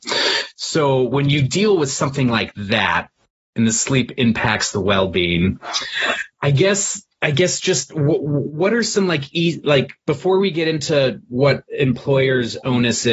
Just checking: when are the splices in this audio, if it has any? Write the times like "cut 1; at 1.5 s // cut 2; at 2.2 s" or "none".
none